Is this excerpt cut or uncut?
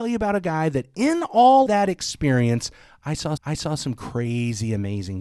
cut